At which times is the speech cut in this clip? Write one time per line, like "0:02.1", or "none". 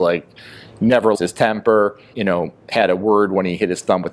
0:01.1
0:02.1